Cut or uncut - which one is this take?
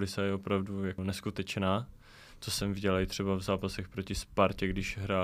uncut